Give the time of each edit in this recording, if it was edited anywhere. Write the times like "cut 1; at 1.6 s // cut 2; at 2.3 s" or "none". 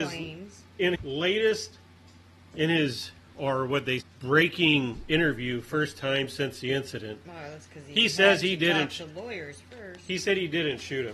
cut 1; at 0.9 s // cut 2; at 4.0 s